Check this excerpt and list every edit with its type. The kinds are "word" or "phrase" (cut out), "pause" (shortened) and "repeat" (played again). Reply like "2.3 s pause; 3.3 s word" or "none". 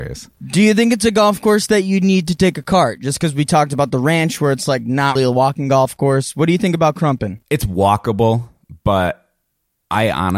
5.2 s word; 7.4 s pause